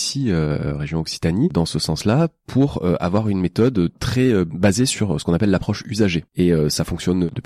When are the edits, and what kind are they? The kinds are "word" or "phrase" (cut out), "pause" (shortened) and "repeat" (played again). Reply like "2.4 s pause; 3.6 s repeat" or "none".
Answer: 6.3 s pause